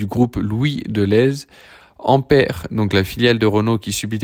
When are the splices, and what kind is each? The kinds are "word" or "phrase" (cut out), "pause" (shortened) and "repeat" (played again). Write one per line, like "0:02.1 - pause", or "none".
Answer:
none

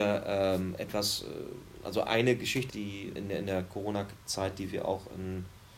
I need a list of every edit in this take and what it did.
0:02.7 - phrase
0:03.2 - word

